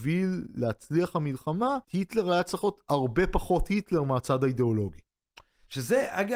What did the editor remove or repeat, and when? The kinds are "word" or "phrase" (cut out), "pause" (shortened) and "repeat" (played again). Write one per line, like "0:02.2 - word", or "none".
0:01.8 - pause